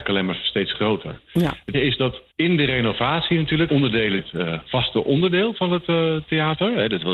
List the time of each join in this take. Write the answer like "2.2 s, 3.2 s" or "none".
1.7 s, 2.3 s, 3.7 s, 4.2 s

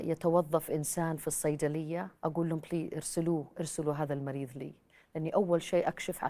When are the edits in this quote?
2.2 s

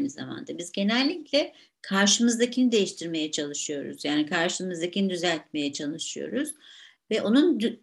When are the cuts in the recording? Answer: none

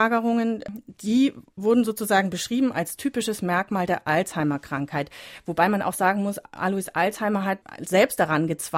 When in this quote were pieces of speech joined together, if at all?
none

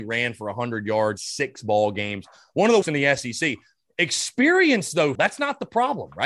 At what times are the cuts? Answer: 1.2 s, 2.8 s, 5.1 s

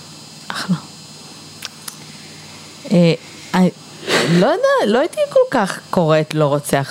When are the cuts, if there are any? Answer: none

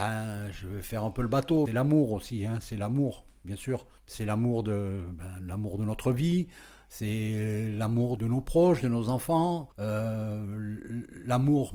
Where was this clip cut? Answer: 1.7 s, 4.0 s, 8.2 s, 9.7 s

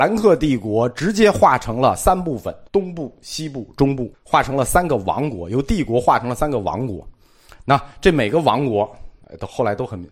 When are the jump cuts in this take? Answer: 2.7 s, 4.1 s

